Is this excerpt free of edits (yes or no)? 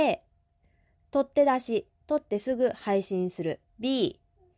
no